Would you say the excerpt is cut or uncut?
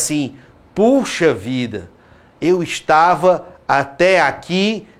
uncut